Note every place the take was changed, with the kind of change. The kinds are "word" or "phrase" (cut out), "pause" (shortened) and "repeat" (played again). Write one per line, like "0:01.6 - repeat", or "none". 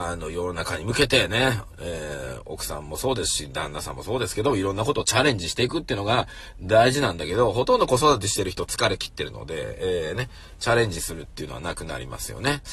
none

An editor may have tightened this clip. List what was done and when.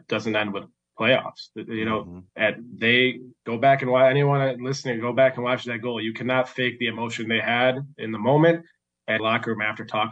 0:02.3 - pause
0:03.4 - pause
0:09.2 - phrase

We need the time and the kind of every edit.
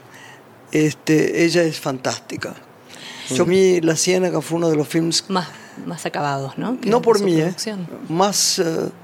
0:03.5 - word
0:08.1 - word

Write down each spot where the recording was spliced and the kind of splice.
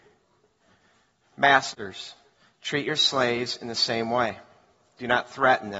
0:02.3 - pause

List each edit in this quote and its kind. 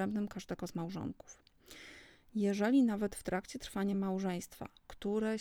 none

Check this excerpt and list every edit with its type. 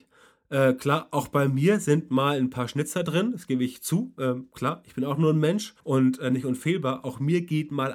0:05.8 - pause

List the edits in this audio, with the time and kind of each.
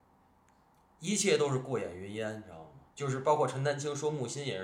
0:02.9 - pause

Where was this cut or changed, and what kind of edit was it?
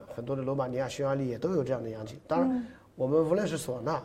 none

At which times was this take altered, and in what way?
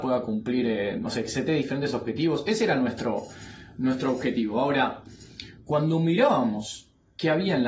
none

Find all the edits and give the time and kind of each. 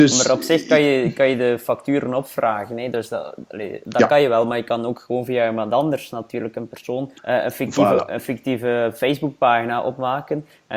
0:07.2 - pause

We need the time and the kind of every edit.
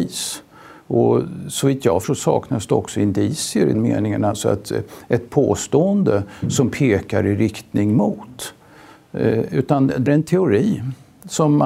0:02.0 - word
0:03.7 - word
0:05.3 - word
0:10.1 - word

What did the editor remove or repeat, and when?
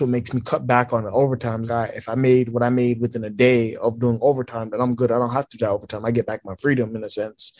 0:01.7 - word

